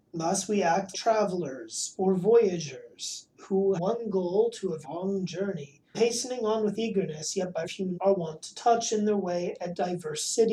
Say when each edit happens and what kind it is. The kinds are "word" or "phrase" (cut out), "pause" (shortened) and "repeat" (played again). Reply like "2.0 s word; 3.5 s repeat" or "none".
0.9 s word; 3.8 s word; 4.8 s word; 5.9 s word; 7.6 s word; 7.9 s word